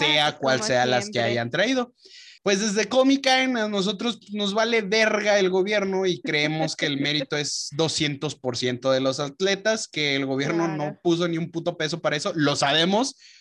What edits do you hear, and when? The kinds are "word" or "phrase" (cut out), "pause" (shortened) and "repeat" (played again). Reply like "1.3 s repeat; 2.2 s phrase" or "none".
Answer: 2.4 s pause